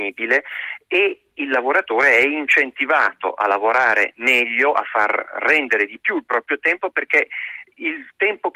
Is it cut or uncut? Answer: uncut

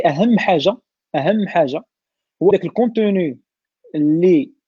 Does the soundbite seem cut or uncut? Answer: cut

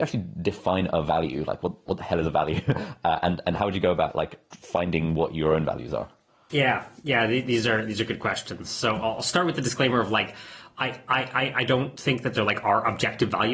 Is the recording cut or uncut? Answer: uncut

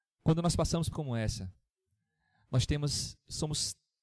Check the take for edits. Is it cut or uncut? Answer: cut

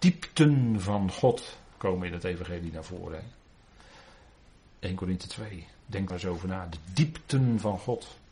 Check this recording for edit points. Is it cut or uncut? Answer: cut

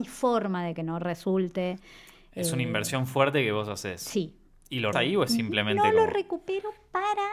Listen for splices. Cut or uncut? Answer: cut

